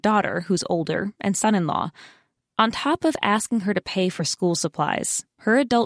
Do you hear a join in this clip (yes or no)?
no